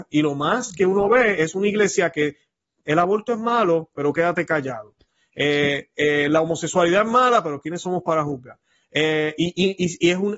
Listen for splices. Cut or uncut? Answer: uncut